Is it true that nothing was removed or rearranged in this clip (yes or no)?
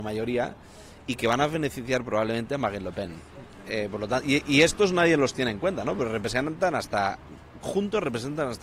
yes